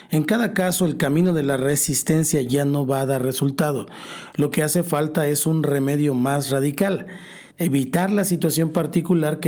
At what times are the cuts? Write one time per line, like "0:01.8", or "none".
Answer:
0:07.5